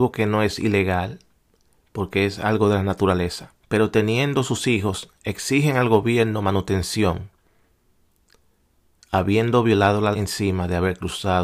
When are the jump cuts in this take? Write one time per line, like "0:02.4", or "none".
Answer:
0:03.6
0:10.1